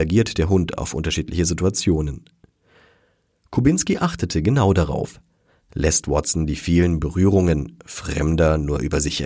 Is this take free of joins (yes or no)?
yes